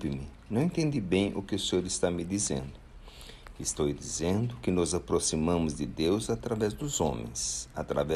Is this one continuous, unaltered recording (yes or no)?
yes